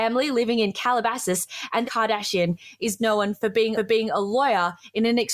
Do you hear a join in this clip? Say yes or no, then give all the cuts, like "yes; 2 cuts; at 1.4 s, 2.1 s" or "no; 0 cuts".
yes; 3 cuts; at 1.8 s, 3.0 s, 3.7 s